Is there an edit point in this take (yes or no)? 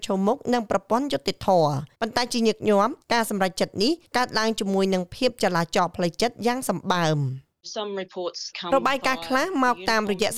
yes